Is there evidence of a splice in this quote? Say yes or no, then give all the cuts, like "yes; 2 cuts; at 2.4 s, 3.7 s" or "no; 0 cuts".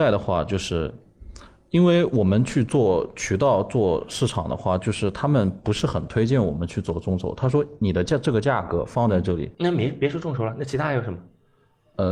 no; 0 cuts